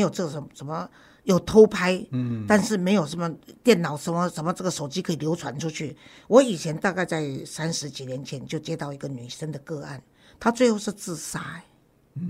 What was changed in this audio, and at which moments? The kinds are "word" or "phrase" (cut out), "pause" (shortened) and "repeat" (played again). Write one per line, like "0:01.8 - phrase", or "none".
none

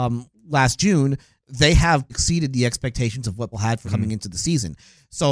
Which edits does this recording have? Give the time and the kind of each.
0:02.1 - word
0:03.5 - word
0:03.8 - word

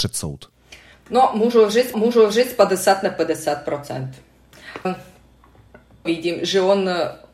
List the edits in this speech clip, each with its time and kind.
0:00.9 - pause
0:01.9 - repeat
0:04.8 - word
0:06.1 - phrase

